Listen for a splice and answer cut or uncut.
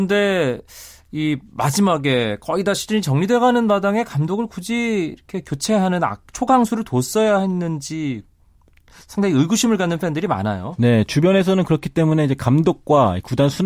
uncut